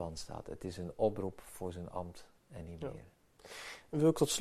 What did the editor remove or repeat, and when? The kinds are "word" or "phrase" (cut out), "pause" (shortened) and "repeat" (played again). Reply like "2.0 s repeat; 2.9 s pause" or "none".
none

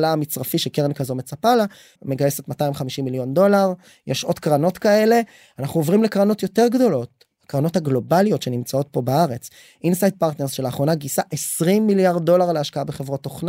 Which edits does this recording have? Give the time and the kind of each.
2.0 s word

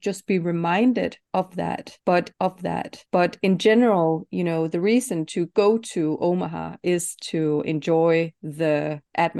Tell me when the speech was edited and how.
2.3 s repeat

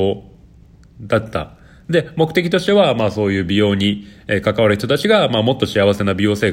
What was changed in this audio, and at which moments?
none

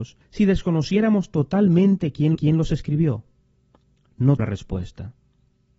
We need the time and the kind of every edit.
2.4 s repeat; 4.4 s word

